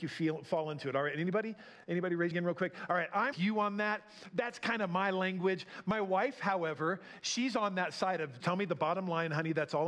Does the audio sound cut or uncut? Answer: cut